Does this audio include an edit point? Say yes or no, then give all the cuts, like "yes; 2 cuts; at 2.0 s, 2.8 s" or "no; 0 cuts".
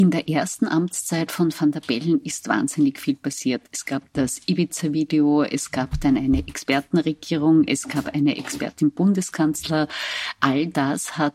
no; 0 cuts